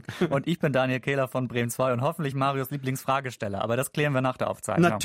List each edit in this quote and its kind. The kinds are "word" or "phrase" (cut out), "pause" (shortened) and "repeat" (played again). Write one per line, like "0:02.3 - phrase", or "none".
none